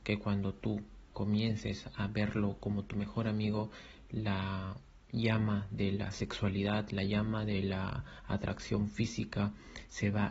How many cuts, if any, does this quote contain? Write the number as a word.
one